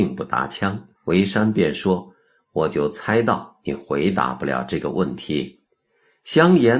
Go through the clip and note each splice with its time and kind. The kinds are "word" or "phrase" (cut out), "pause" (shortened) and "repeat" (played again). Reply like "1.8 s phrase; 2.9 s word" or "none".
1.0 s pause; 5.6 s pause